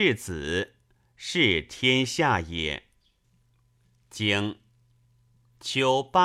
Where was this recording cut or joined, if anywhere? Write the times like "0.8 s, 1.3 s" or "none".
none